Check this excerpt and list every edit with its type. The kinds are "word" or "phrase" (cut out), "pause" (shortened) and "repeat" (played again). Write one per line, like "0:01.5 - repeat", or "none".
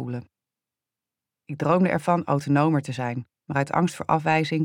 0:03.4 - pause